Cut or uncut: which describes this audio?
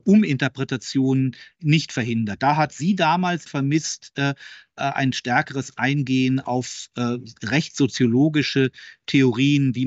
cut